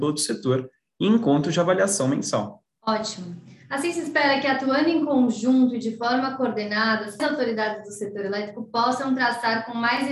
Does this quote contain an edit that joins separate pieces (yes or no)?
yes